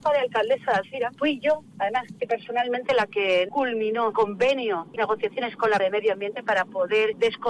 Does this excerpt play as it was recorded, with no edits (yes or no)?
no